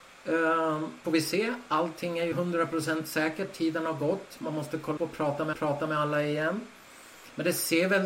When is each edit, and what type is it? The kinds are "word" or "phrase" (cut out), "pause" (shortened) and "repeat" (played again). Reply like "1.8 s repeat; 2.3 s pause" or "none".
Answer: 1.0 s phrase; 2.3 s word; 5.0 s word; 5.5 s repeat